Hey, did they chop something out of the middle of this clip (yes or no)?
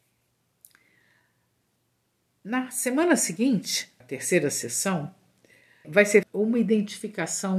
yes